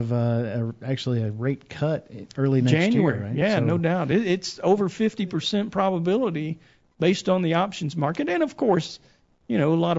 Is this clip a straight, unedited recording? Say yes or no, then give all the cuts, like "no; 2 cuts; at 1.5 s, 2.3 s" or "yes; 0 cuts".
yes; 0 cuts